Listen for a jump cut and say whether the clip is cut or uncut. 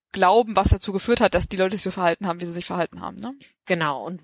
uncut